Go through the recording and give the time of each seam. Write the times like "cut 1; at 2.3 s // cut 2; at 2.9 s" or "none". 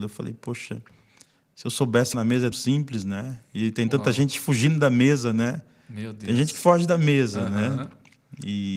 cut 1; at 2.1 s // cut 2; at 2.5 s